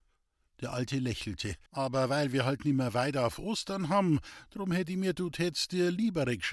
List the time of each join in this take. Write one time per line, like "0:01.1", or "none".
0:01.7
0:05.2